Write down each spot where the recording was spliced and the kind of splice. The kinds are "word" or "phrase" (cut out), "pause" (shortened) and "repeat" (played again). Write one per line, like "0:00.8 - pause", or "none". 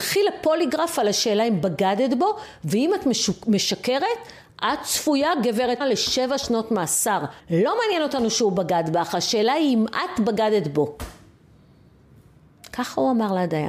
0:05.8 - word
0:07.4 - pause